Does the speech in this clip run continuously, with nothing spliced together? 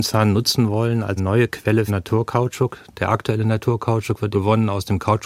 no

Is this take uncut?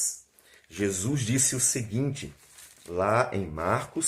yes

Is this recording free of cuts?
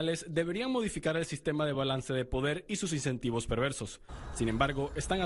yes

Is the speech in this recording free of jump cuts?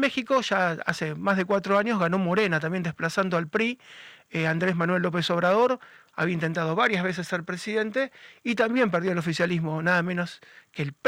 yes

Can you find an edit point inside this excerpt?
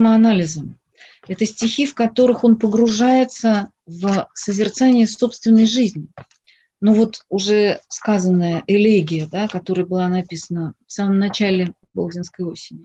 no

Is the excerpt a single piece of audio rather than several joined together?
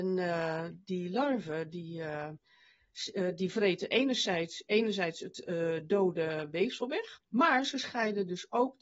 no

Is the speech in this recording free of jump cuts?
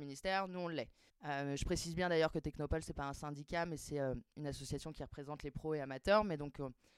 no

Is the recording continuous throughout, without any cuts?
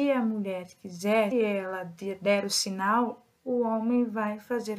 no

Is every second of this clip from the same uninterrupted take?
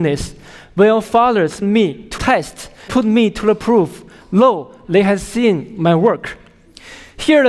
no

